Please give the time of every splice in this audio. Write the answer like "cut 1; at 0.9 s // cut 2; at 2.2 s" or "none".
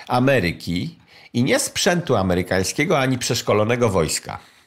none